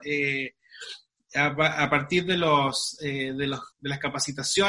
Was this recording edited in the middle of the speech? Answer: yes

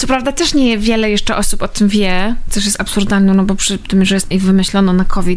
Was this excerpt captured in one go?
no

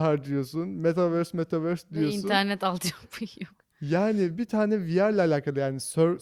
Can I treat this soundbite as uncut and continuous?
yes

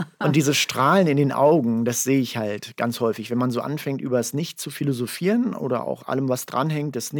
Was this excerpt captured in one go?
yes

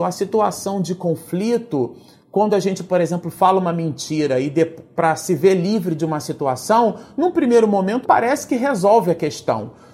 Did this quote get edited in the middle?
yes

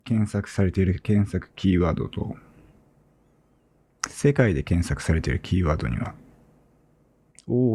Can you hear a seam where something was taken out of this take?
no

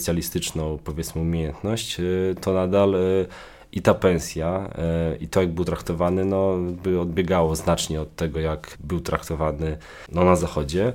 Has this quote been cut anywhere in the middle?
no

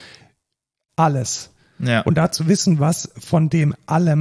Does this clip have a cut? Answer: no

